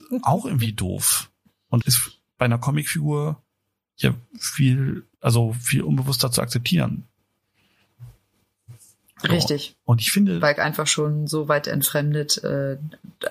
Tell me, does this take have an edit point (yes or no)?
yes